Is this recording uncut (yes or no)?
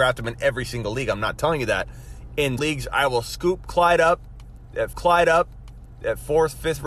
no